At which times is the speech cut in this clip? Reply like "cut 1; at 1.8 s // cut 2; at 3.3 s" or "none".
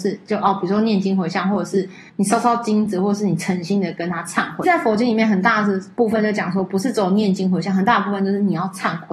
cut 1; at 2.1 s // cut 2; at 4.6 s